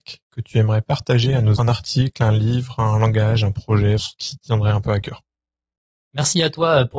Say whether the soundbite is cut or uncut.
cut